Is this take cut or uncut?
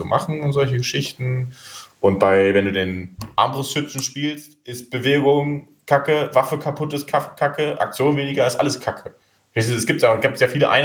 uncut